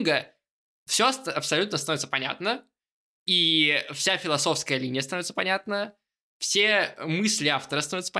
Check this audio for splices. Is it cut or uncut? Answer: uncut